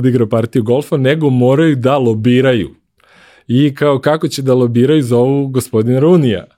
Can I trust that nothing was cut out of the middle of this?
yes; 0 cuts

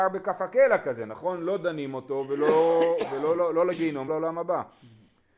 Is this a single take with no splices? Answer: no; 1 cut; at 4.1 s

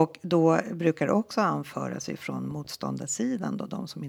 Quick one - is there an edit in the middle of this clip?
no; 0 cuts

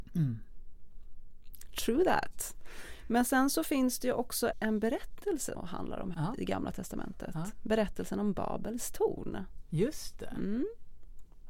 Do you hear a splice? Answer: yes; 3 cuts; at 4.5 s, 5.5 s, 6.1 s

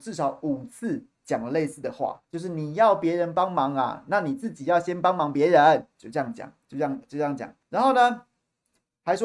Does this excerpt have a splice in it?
yes; 2 cuts; at 2.2 s, 7.6 s

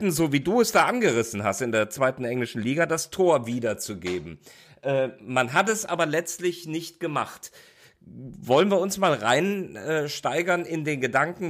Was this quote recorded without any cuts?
yes; 0 cuts

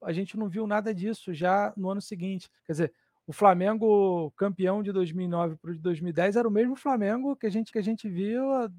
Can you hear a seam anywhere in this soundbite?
yes; 2 cuts; at 2.6 s, 7.7 s

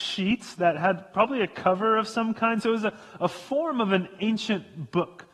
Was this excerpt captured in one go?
yes; 0 cuts

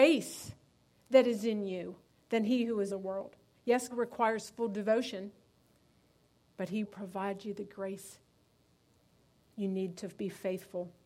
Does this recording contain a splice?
yes; 4 cuts; at 2.1 s, 2.9 s, 3.9 s, 6.8 s

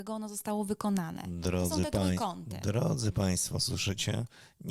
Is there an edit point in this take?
no; 0 cuts

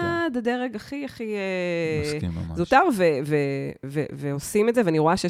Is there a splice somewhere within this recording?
no; 0 cuts

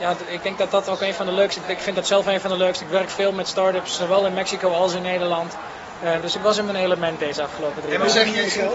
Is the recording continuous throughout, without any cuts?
no; 1 cut; at 6.2 s

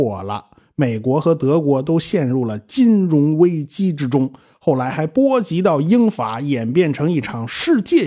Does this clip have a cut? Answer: no; 0 cuts

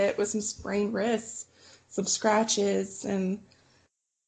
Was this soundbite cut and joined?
no; 0 cuts

